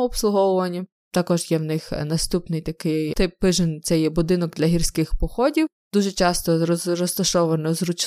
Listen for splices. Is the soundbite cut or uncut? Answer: uncut